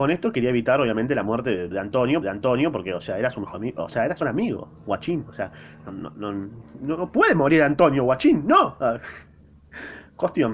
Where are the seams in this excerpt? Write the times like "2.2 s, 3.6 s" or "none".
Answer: 1.7 s, 2.2 s, 3.5 s, 4.2 s, 5.9 s